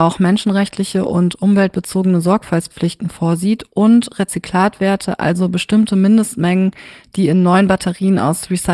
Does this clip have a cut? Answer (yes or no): no